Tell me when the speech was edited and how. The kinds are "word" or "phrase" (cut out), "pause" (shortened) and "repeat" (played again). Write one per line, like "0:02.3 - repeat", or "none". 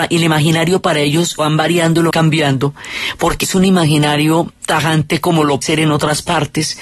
0:01.4 - word
0:02.1 - word
0:03.4 - word
0:05.6 - word